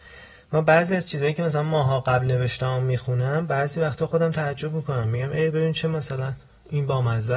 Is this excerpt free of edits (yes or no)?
yes